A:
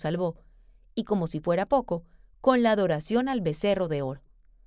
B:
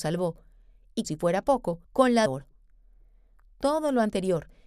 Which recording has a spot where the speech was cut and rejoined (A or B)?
B